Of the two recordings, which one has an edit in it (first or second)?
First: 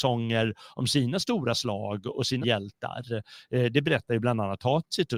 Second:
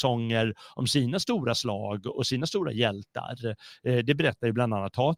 first